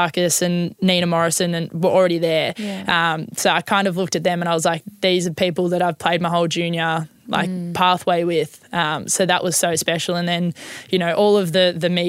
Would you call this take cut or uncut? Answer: uncut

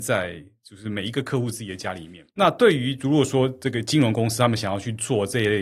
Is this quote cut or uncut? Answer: cut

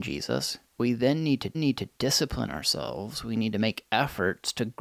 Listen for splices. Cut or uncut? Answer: cut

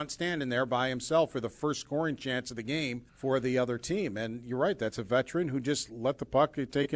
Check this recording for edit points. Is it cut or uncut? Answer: cut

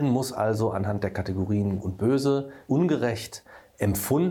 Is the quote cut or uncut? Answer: cut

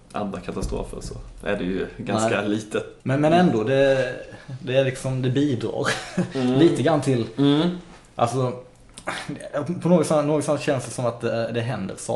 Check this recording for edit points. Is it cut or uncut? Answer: cut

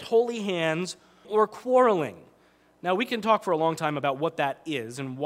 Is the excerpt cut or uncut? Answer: cut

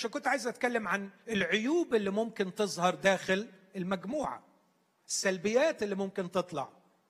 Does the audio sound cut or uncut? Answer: uncut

